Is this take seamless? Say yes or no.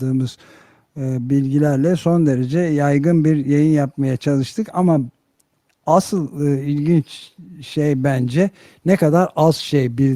yes